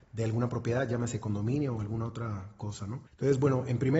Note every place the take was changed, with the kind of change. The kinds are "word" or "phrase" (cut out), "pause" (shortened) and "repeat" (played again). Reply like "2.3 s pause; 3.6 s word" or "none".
3.1 s pause

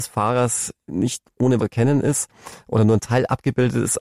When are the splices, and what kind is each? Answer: 1.6 s word

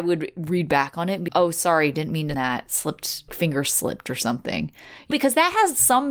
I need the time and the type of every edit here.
1.3 s word; 2.3 s word; 3.3 s word; 5.1 s word

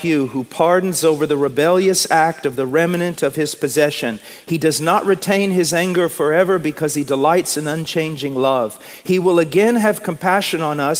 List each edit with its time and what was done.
1.0 s phrase

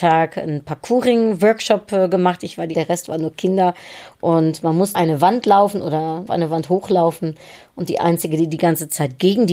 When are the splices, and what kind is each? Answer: 2.7 s phrase; 4.9 s word; 6.3 s phrase

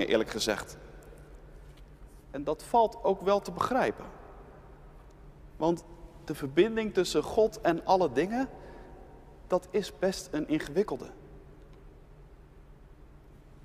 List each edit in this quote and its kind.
5.5 s pause

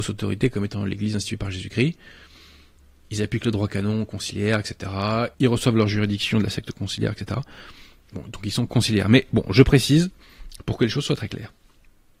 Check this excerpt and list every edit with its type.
5.3 s pause

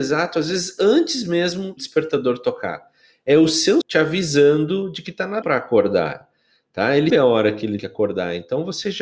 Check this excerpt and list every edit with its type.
1.8 s word; 3.8 s word; 5.4 s word; 7.1 s word; 7.8 s word

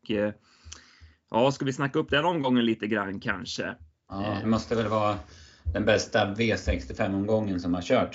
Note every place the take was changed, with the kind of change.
4.4 s word

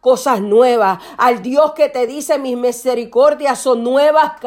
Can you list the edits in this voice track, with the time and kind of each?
none

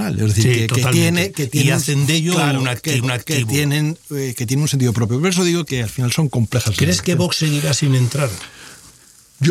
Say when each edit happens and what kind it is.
3.0 s repeat; 5.7 s word

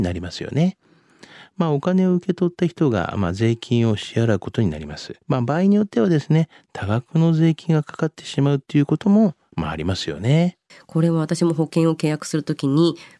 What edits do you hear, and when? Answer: 5.2 s pause; 10.7 s pause

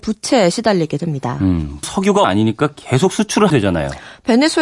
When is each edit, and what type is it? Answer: 1.8 s word; 2.2 s phrase; 3.5 s word

